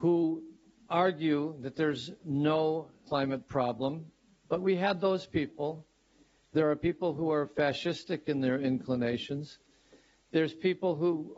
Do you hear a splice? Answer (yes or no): no